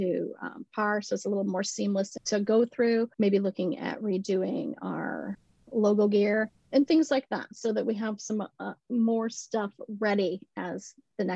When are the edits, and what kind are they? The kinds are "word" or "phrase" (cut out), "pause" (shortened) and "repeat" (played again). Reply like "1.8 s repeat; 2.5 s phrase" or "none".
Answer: 3.1 s pause; 5.6 s pause; 6.6 s pause; 8.8 s pause